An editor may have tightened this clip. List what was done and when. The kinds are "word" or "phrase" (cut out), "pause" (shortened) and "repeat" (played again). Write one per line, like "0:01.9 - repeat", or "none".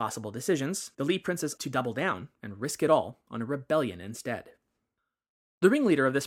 0:00.9 - pause
0:01.6 - word